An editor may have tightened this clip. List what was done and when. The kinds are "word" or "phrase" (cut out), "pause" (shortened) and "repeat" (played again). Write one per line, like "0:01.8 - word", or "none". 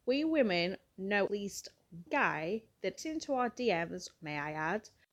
0:01.3 - word
0:02.1 - word
0:03.0 - word
0:04.2 - word